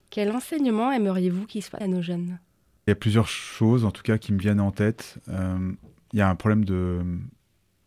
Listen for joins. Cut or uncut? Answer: cut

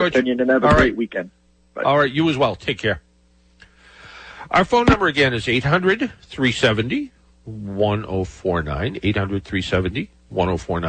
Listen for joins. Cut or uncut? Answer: uncut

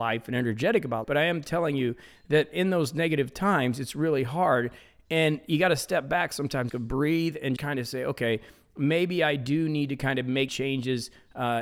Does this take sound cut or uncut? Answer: cut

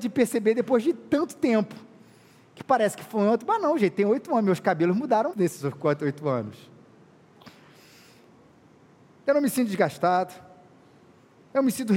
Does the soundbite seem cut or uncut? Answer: cut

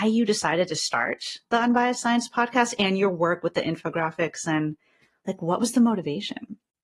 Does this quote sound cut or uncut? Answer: uncut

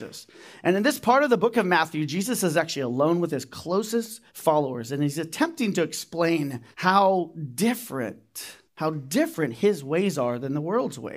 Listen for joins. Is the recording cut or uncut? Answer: cut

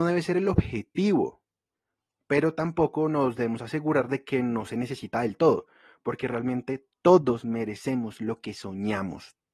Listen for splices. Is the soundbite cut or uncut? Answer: uncut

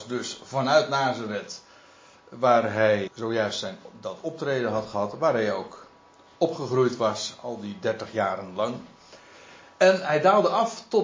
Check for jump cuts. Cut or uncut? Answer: cut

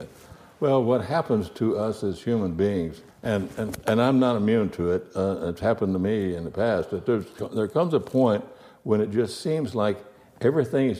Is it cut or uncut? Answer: cut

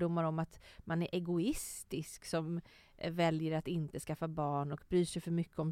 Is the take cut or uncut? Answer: uncut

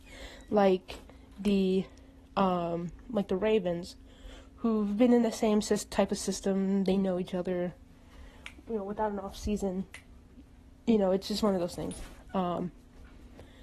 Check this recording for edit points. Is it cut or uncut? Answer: uncut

